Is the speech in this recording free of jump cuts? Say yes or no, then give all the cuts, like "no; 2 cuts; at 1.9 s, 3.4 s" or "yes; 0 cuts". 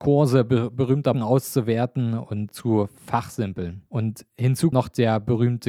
no; 4 cuts; at 1.1 s, 2.5 s, 3.9 s, 4.7 s